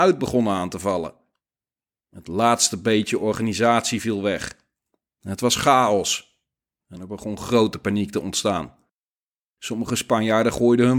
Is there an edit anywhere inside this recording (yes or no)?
no